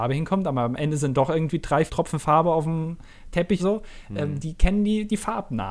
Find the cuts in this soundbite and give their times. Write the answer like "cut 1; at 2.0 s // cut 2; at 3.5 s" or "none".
cut 1; at 1.9 s // cut 2; at 3.6 s